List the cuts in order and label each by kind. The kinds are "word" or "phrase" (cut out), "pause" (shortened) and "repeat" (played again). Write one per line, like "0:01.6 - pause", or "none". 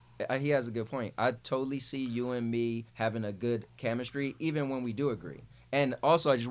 0:02.9 - pause

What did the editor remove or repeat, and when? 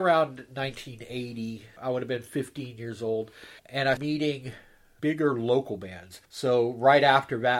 0:01.8 - word
0:03.6 - pause
0:04.0 - word
0:05.0 - word
0:06.2 - pause

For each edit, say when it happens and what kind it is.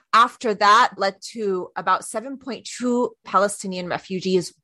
0:01.0 - word
0:03.2 - word

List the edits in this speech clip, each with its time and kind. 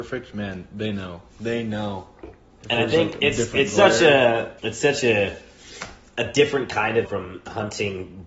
0:01.3 - pause
0:02.2 - pause
0:04.6 - pause
0:07.0 - phrase

